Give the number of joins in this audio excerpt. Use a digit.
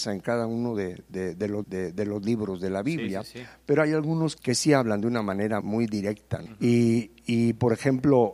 4